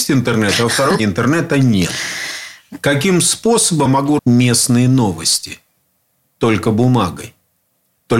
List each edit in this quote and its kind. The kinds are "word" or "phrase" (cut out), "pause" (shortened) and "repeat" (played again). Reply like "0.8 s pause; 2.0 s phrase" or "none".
1.0 s word; 3.9 s word; 4.2 s word